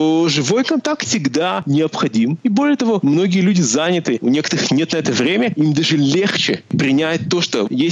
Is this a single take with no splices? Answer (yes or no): no